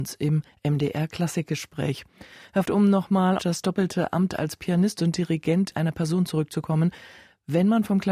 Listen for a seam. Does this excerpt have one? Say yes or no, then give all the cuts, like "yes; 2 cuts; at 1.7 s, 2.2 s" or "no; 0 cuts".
yes; 3 cuts; at 2.7 s, 3.4 s, 5.7 s